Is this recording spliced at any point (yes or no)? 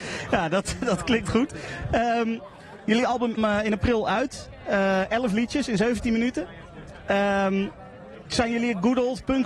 yes